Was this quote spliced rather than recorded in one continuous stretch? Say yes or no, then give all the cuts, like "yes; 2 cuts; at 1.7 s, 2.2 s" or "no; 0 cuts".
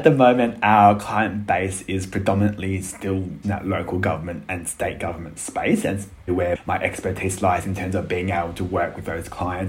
yes; 2 cuts; at 3.4 s, 6.3 s